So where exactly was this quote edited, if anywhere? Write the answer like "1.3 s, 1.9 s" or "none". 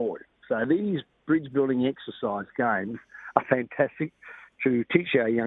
none